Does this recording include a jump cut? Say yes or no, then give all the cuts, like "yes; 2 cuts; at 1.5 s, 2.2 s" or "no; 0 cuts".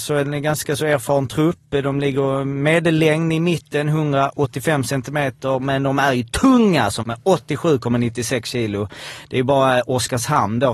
yes; 1 cut; at 7.0 s